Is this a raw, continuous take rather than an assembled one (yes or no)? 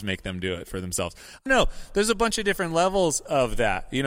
no